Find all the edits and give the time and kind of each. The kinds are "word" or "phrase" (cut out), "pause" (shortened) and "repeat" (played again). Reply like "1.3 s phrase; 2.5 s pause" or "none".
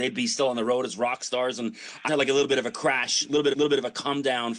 2.1 s word; 3.5 s repeat